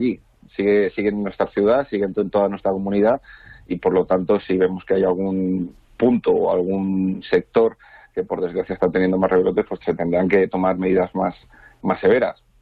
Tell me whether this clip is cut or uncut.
uncut